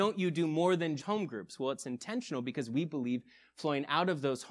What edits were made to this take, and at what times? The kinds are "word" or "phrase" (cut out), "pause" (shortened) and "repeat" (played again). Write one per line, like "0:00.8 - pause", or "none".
0:01.0 - word